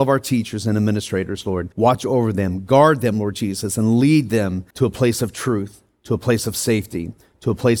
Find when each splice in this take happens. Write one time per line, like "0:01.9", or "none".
0:01.7
0:04.7